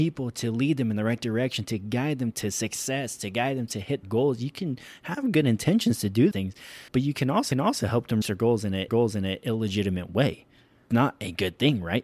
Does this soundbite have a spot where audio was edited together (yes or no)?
yes